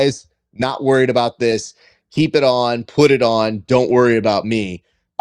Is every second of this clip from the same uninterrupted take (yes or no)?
yes